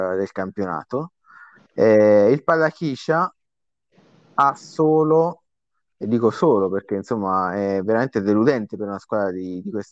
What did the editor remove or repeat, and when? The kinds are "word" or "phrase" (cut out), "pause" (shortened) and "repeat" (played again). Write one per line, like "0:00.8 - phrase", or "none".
none